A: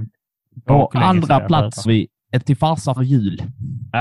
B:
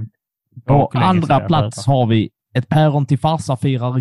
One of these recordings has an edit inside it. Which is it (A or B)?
A